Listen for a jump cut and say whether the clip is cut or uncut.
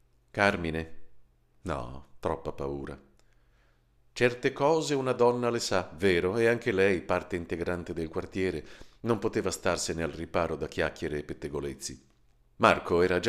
uncut